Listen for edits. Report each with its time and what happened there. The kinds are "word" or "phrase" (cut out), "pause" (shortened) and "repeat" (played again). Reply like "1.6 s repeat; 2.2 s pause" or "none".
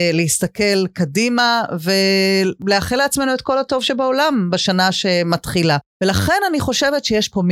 5.9 s pause